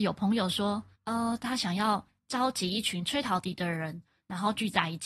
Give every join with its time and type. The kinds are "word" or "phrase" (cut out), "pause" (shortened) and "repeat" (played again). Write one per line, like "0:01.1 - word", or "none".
0:00.9 - pause
0:02.2 - pause